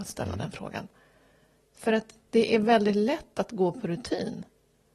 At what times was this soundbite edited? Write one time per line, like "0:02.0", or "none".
none